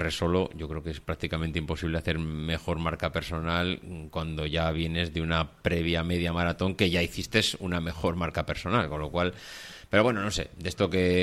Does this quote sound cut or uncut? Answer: uncut